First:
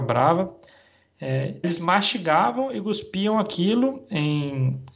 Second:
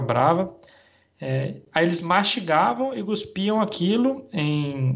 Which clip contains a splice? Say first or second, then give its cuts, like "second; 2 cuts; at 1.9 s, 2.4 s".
first; 1 cut; at 1.6 s